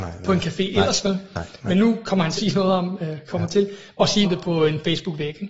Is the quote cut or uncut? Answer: cut